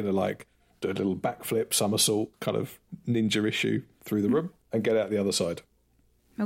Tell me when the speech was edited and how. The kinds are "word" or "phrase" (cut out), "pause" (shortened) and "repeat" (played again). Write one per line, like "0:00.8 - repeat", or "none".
0:02.3 - pause
0:04.6 - pause